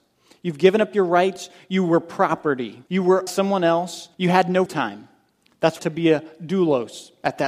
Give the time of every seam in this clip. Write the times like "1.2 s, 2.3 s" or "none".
2.9 s, 3.3 s, 4.1 s, 4.7 s, 5.8 s